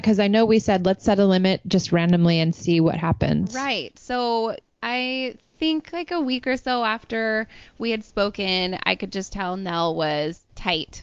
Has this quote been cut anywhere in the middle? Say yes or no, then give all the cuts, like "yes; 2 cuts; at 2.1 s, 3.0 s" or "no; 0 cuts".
no; 0 cuts